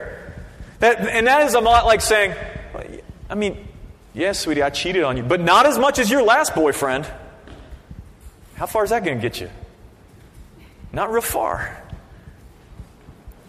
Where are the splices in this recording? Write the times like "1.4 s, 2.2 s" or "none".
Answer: none